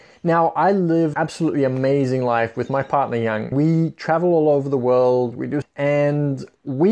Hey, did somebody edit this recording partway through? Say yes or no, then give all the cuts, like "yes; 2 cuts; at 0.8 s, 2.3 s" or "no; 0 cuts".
yes; 3 cuts; at 1.1 s, 3.5 s, 5.6 s